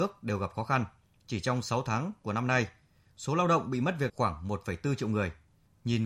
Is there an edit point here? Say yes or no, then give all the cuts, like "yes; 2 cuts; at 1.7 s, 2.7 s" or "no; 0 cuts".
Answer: yes; 1 cut; at 4.1 s